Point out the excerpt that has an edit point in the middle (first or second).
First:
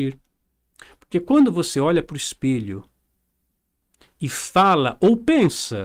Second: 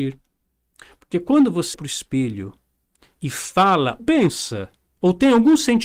second